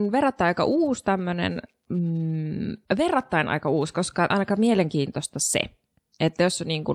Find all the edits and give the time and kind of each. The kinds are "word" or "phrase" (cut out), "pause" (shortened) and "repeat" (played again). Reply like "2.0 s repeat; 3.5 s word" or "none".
2.8 s pause; 4.3 s word